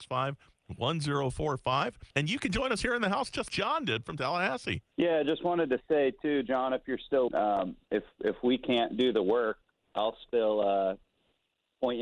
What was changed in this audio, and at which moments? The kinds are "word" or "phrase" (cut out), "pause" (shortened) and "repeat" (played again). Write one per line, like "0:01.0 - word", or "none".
0:02.1 - pause
0:03.5 - word
0:04.9 - pause
0:07.3 - word